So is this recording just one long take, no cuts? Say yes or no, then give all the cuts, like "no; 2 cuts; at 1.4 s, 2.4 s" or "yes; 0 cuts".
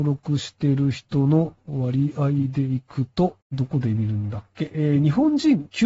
no; 1 cut; at 3.4 s